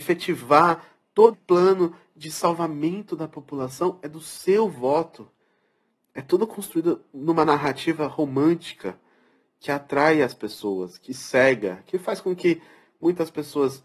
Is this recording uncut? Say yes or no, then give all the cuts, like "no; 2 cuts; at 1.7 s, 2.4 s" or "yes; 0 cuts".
no; 1 cut; at 1.3 s